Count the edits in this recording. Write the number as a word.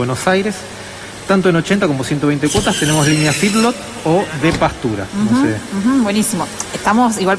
zero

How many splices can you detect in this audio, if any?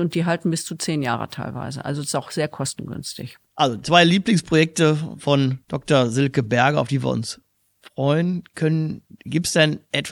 two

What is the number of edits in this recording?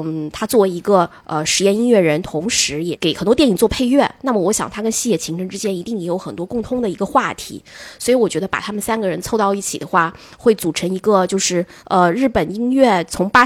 one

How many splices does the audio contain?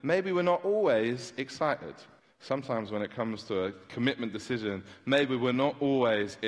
one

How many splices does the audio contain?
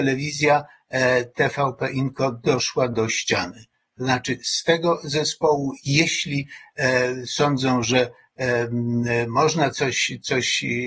zero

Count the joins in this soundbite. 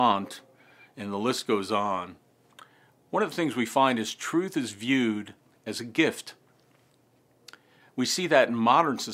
zero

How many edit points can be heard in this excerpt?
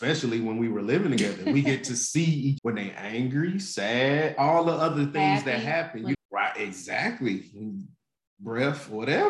two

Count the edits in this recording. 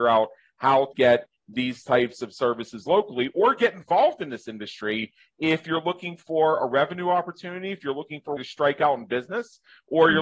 two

